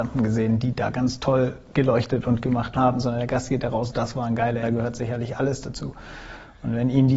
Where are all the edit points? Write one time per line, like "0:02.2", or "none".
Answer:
0:02.8
0:03.9
0:04.6